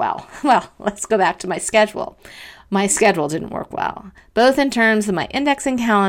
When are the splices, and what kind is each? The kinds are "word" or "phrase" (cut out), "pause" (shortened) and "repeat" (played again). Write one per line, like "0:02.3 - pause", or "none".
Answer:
none